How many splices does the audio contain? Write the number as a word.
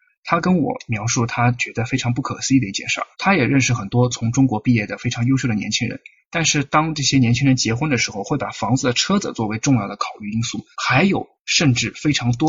two